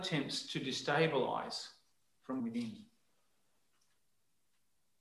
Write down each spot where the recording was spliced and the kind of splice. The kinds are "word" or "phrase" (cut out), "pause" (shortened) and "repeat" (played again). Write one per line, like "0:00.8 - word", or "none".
0:02.4 - phrase